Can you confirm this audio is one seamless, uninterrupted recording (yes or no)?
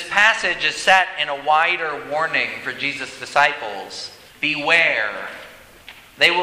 no